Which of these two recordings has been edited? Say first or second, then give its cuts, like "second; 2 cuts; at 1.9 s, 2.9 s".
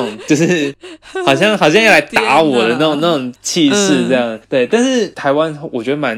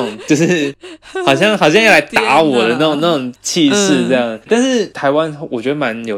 second; 1 cut; at 4.5 s